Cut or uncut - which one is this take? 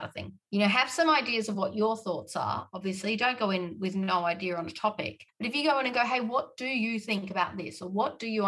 uncut